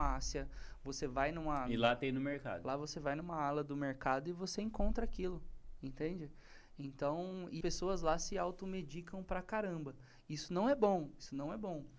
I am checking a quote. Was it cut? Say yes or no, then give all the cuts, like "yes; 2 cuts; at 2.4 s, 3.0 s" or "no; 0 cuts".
yes; 1 cut; at 7.6 s